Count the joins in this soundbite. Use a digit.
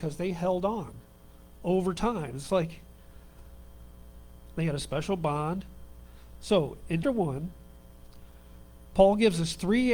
1